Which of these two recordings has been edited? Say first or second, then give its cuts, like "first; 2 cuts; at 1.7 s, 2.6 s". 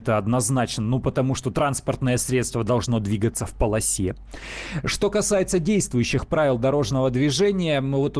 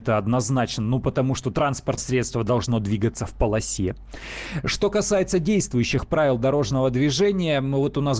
second; 1 cut; at 2.0 s